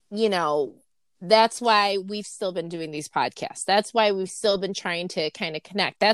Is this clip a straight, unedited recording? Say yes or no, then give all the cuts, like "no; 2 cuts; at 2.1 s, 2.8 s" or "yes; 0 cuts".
yes; 0 cuts